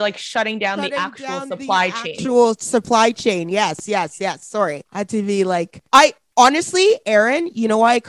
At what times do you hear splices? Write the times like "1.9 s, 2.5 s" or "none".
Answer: 4.9 s, 5.9 s